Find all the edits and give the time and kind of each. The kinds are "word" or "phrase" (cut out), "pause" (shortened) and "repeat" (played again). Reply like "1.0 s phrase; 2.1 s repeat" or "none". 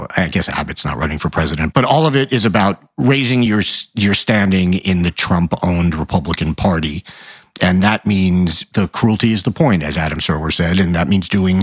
none